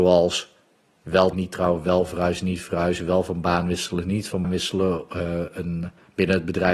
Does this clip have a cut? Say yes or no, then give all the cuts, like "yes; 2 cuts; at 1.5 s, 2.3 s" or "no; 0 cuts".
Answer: yes; 2 cuts; at 1.3 s, 4.4 s